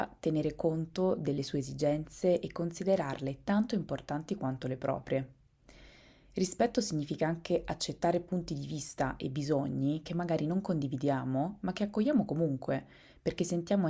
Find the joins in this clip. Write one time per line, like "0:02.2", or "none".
none

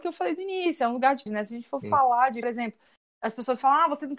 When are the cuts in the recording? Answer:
0:01.3
0:02.4

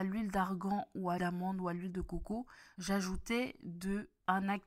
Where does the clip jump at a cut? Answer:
0:01.2

